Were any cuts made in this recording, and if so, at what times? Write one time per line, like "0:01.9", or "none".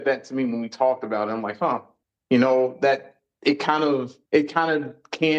0:02.0
0:04.3